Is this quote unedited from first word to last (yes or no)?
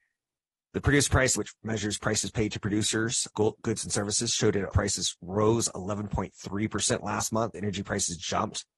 no